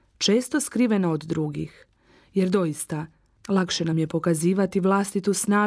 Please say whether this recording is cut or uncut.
uncut